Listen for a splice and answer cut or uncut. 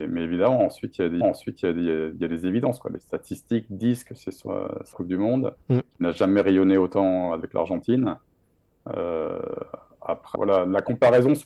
cut